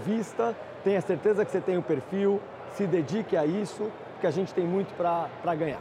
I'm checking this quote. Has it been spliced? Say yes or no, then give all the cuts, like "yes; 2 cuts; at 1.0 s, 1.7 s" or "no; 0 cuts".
no; 0 cuts